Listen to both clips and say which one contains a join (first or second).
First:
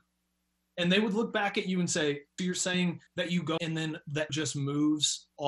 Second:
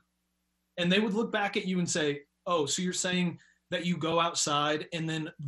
first